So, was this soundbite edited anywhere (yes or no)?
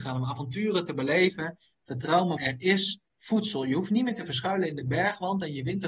yes